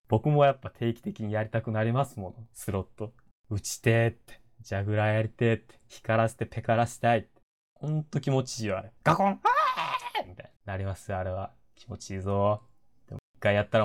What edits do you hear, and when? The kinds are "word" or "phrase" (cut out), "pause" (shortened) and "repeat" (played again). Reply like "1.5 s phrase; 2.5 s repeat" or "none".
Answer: 3.3 s pause; 7.4 s pause; 9.0 s pause; 10.6 s pause